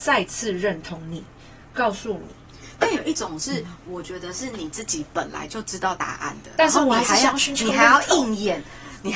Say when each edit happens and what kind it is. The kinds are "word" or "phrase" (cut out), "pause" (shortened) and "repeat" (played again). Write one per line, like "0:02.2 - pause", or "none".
none